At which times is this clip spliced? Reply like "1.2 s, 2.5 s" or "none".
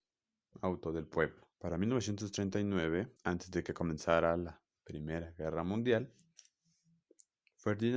1.5 s, 3.2 s